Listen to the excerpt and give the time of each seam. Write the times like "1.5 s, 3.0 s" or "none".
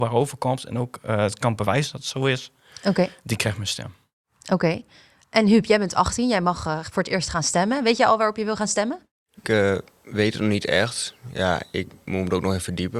none